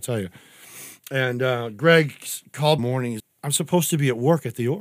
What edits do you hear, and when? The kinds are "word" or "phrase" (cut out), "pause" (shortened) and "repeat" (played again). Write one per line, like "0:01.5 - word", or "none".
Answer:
0:01.0 - pause
0:02.8 - phrase
0:03.2 - word